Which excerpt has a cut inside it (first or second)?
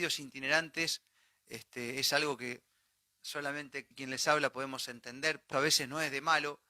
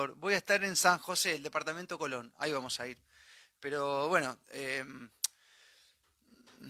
first